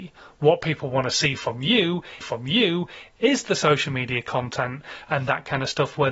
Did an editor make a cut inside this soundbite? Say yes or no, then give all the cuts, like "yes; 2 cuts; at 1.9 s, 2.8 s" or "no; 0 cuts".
yes; 1 cut; at 2.2 s